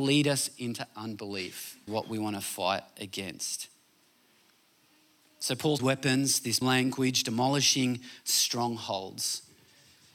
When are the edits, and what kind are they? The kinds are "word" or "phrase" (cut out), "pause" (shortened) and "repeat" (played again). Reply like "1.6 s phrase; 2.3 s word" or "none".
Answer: 1.9 s word; 5.8 s phrase; 6.6 s word